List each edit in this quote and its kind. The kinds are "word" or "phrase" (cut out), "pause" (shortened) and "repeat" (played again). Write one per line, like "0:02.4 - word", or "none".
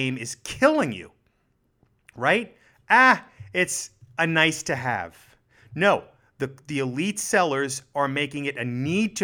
none